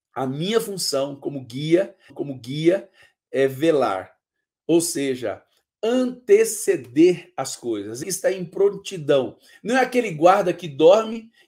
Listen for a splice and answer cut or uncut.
cut